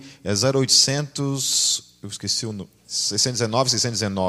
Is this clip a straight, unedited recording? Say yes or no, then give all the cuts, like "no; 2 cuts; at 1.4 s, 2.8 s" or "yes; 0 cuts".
no; 1 cut; at 2.8 s